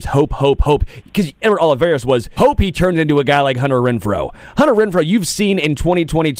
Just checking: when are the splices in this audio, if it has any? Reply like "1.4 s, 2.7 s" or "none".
1.4 s, 2.4 s